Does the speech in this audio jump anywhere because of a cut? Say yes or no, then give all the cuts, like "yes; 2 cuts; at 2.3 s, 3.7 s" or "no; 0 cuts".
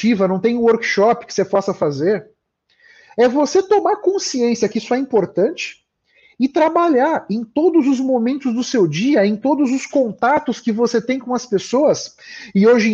no; 0 cuts